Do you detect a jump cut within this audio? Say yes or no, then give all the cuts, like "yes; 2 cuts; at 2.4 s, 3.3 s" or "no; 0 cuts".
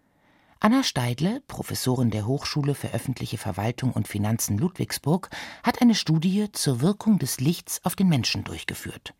no; 0 cuts